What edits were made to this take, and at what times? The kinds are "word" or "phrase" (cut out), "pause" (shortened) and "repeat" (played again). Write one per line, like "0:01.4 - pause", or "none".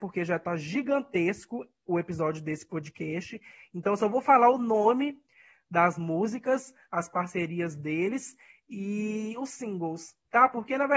none

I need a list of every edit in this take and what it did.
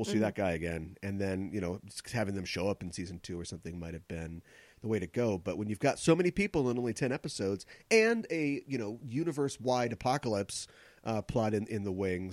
none

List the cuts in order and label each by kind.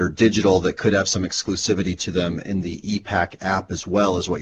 none

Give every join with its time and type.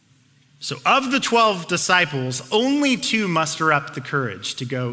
none

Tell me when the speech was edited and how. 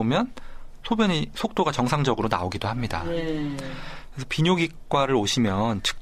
none

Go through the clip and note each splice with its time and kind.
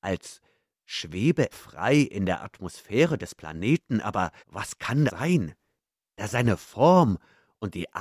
0:01.5 - word
0:04.4 - pause
0:05.1 - word

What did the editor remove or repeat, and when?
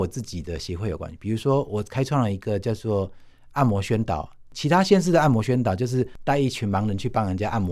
none

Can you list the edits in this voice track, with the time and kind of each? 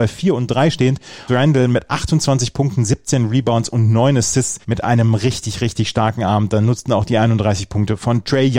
0:01.3 - phrase
0:04.6 - pause

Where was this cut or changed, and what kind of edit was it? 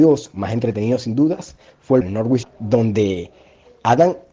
0:02.0 - phrase
0:02.4 - word

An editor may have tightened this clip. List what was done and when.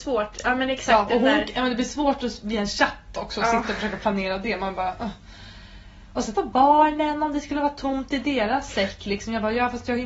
0:06.3 - word

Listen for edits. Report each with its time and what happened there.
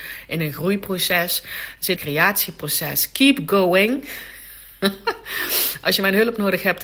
0:02.0 - phrase

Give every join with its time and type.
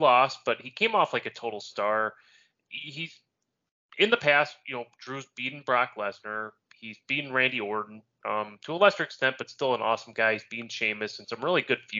none

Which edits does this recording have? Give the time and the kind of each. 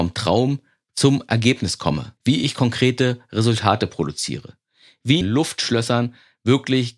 0:02.2 - pause
0:05.2 - phrase

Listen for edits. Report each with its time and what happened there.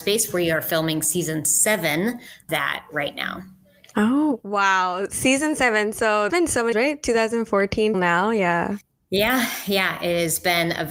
0:02.5 - word
0:06.3 - word
0:06.7 - word
0:07.9 - word

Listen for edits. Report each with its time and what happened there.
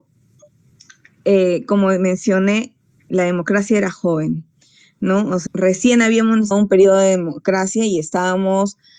0:05.5 - phrase
0:06.5 - word

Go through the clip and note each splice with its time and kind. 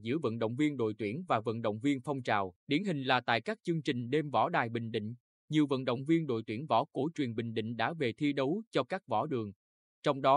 0:02.6 - pause

